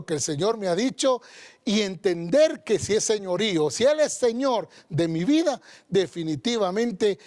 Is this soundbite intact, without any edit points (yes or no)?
yes